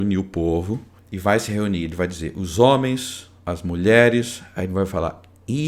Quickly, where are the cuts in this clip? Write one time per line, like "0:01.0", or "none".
0:01.0

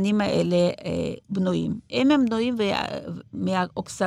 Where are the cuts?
0:01.2

